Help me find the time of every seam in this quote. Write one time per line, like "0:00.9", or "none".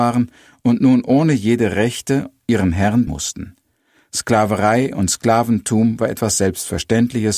0:03.1